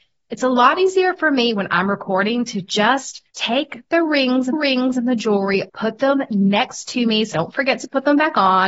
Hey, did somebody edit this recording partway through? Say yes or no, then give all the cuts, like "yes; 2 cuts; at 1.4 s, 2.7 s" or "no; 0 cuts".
yes; 4 cuts; at 3.3 s, 4.5 s, 5.7 s, 7.3 s